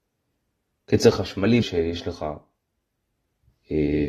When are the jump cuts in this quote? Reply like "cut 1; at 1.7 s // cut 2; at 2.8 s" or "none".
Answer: cut 1; at 1.6 s

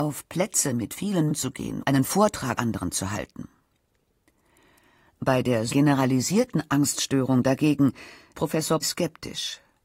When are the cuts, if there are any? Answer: cut 1; at 1.3 s // cut 2; at 1.8 s // cut 3; at 2.6 s // cut 4; at 5.7 s // cut 5; at 8.3 s // cut 6; at 8.8 s

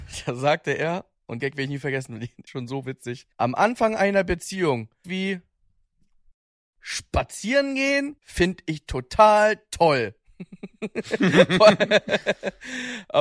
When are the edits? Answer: cut 1; at 1.4 s // cut 2; at 2.5 s // cut 3; at 3.3 s // cut 4; at 5.0 s // cut 5; at 8.2 s

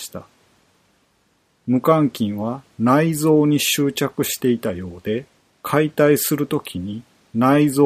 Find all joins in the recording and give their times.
cut 1; at 5.4 s

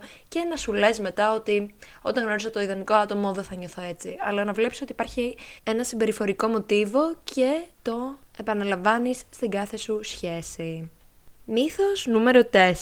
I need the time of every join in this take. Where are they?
cut 1; at 5.6 s // cut 2; at 11.4 s

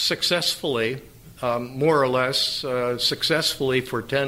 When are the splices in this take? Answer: none

